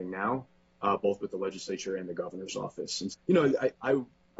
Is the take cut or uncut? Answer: cut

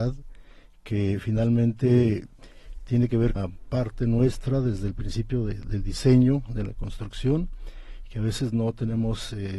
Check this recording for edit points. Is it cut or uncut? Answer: cut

